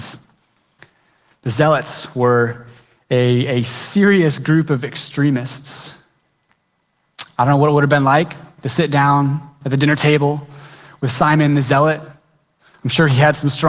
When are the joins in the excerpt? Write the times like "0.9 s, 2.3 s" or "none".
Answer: none